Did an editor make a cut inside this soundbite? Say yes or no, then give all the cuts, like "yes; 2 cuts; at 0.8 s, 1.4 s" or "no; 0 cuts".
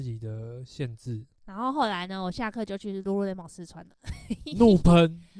no; 0 cuts